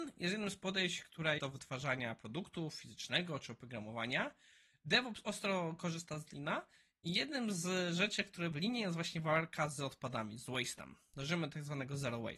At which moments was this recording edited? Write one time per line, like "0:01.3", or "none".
0:01.4
0:08.5